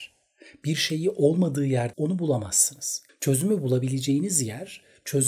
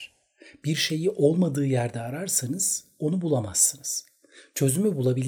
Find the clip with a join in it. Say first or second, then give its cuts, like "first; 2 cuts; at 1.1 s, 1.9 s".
first; 2 cuts; at 1.9 s, 3.1 s